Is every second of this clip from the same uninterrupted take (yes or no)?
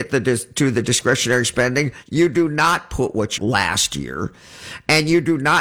no